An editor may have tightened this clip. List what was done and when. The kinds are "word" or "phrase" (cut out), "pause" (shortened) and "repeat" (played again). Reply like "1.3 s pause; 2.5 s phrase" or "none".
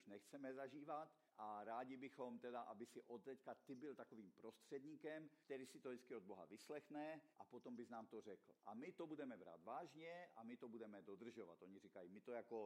1.3 s pause; 5.4 s pause; 7.3 s pause; 8.6 s pause